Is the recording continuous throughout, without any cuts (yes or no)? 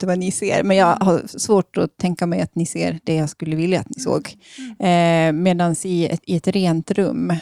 no